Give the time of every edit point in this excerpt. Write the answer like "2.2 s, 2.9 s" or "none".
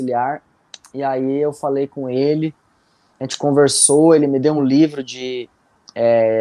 none